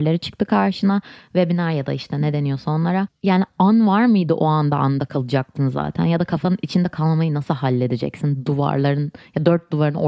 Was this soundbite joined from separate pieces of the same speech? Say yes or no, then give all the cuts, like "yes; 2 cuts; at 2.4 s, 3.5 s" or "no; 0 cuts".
no; 0 cuts